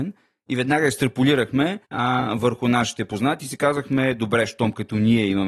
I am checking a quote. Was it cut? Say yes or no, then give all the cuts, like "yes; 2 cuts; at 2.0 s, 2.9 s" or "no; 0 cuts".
yes; 1 cut; at 1.8 s